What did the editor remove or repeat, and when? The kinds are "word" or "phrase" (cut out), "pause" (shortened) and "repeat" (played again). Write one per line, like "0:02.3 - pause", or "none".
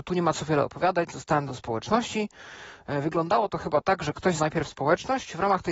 0:01.5 - word
0:04.4 - word